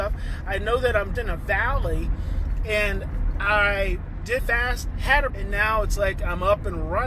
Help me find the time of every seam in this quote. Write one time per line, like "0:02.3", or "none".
0:01.1
0:04.4
0:05.3